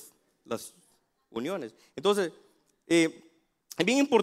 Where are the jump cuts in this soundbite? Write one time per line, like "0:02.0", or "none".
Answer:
none